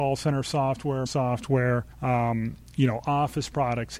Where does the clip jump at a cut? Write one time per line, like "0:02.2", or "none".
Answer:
0:01.1
0:01.9